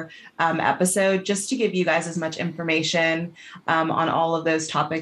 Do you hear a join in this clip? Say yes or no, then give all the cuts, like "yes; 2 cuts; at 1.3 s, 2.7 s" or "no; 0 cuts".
no; 0 cuts